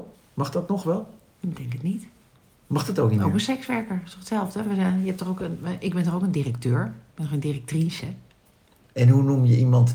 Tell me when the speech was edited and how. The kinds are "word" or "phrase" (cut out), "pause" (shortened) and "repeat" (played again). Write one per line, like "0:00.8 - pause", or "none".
none